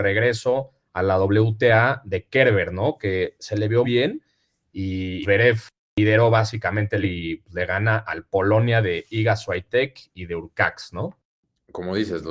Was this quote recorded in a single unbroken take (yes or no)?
no